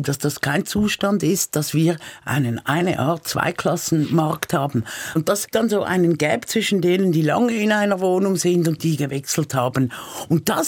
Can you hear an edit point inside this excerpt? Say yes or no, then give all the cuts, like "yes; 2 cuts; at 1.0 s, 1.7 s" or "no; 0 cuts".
yes; 2 cuts; at 5.5 s, 8.8 s